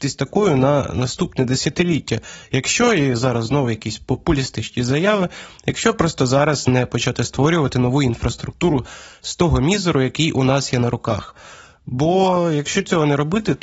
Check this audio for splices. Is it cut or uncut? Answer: uncut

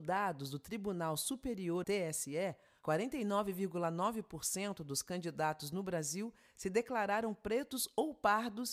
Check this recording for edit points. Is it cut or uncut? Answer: cut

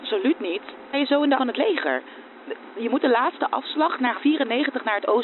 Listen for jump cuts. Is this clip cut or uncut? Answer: cut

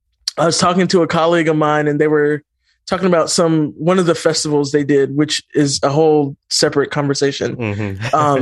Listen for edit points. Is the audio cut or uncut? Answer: uncut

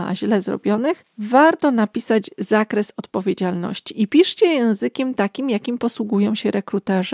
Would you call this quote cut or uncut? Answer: uncut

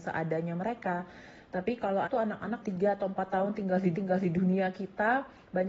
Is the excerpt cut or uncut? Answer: cut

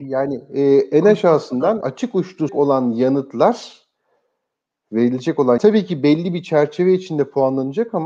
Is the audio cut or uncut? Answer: cut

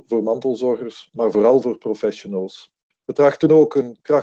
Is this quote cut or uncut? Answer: uncut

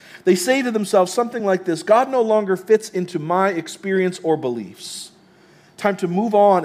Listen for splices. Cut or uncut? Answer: uncut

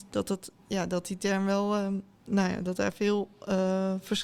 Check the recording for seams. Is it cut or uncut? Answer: uncut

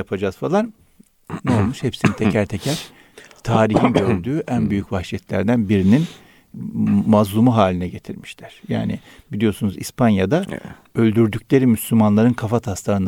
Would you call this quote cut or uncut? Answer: uncut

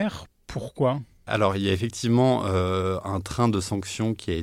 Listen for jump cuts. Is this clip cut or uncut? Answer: uncut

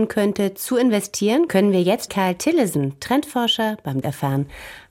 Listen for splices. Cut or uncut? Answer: cut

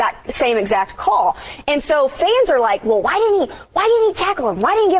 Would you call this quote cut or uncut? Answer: uncut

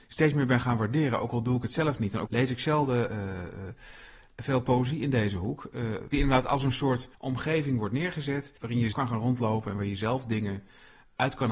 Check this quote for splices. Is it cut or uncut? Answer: cut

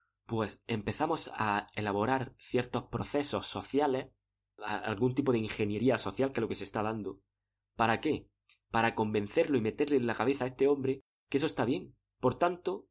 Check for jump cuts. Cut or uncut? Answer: uncut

